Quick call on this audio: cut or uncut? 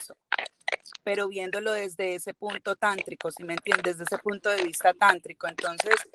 uncut